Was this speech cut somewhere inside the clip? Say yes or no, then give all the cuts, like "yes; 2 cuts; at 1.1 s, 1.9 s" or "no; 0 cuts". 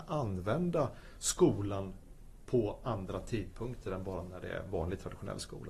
no; 0 cuts